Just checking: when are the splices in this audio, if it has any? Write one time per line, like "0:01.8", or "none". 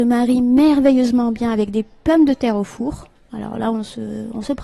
none